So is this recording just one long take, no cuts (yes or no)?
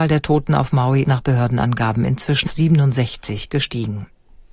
no